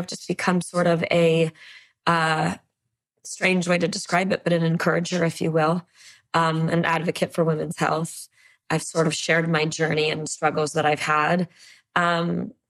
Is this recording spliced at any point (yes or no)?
no